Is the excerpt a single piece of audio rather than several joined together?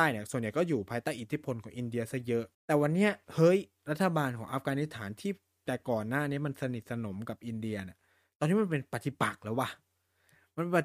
no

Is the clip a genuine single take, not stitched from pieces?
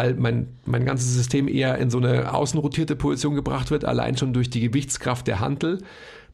yes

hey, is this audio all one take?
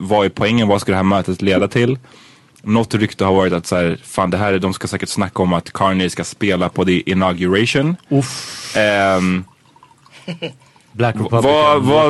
yes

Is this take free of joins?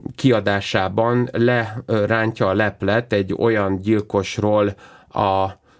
yes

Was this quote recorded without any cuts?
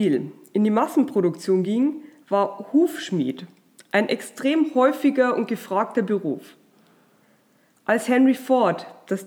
yes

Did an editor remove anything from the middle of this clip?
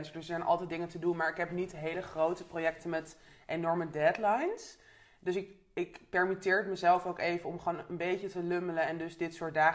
no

